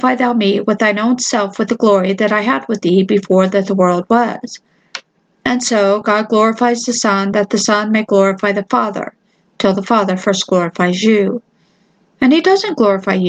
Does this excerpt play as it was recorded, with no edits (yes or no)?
yes